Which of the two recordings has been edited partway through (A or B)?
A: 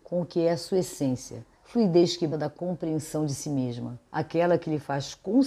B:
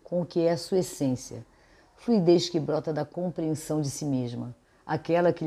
A